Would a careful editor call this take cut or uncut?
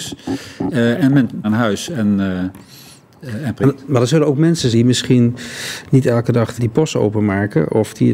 cut